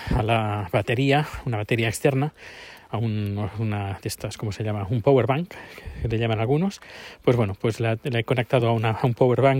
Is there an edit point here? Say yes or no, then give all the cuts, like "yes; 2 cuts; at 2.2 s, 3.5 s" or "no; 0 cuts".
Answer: no; 0 cuts